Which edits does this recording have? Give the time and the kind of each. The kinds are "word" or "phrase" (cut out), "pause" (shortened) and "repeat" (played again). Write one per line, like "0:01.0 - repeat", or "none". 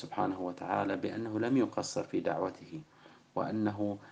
none

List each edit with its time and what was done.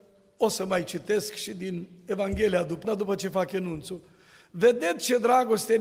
0:02.8 - word

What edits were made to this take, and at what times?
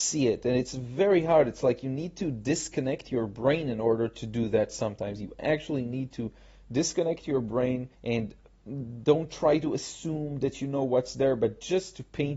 0:07.9 - pause

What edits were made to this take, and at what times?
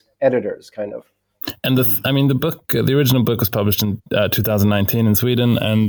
0:04.1 - pause

